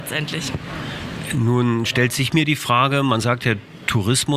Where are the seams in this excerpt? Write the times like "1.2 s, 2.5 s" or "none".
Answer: none